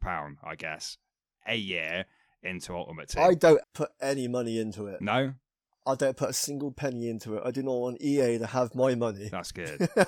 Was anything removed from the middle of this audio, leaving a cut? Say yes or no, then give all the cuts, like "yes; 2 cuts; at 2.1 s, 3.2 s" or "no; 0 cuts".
yes; 1 cut; at 3.6 s